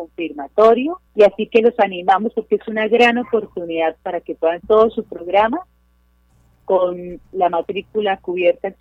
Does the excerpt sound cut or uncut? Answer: cut